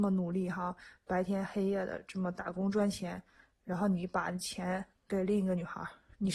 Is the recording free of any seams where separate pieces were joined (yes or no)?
yes